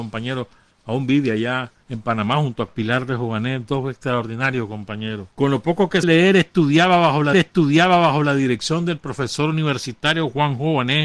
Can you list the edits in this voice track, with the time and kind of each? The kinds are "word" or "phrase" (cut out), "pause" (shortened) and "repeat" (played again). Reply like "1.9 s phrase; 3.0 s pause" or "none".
1.8 s pause; 2.7 s phrase; 5.3 s pause; 6.0 s word; 7.3 s repeat